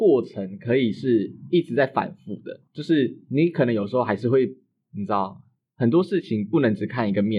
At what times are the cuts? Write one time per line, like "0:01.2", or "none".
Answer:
0:02.7